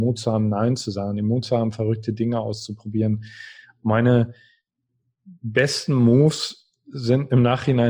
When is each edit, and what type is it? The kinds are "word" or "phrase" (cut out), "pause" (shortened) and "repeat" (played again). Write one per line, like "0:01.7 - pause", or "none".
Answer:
none

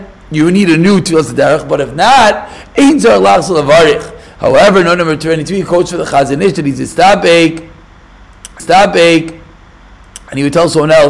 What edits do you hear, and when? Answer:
0:08.6 - repeat

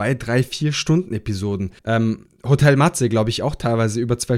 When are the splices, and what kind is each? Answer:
0:01.8 - pause

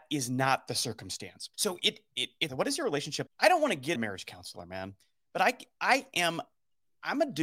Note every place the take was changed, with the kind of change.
0:01.5 - pause
0:02.5 - phrase
0:03.3 - phrase
0:03.9 - phrase

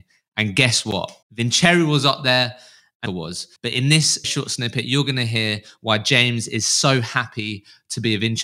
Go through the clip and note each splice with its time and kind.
0:01.2 - pause
0:03.1 - phrase
0:03.6 - pause
0:04.2 - word

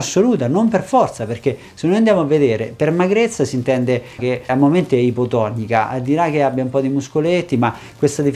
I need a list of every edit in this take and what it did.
0:04.2 - phrase

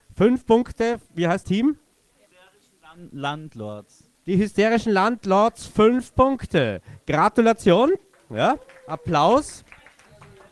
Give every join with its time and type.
0:01.4 - phrase
0:04.1 - pause

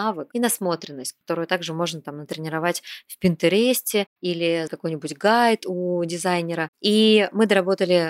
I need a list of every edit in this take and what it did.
0:01.2 - pause
0:04.7 - word

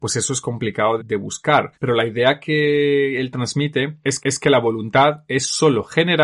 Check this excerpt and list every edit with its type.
0:01.0 - word
0:01.7 - pause
0:04.2 - repeat

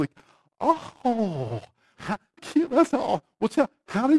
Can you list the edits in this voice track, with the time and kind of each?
0:01.9 - word
0:02.4 - word

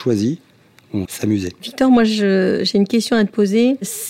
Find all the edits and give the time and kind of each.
0:01.1 - phrase

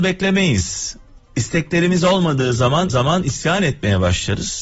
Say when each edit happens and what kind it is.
0:02.9 - repeat

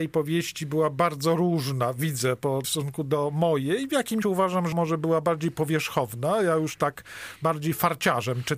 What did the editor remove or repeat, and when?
0:02.6 - phrase
0:04.2 - word
0:04.7 - word

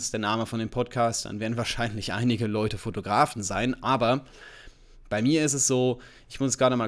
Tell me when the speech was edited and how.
none

